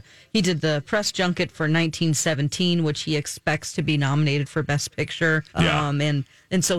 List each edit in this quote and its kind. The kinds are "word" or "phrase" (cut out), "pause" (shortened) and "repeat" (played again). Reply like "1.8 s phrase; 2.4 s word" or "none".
5.5 s pause